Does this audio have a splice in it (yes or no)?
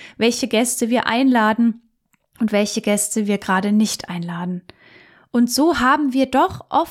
no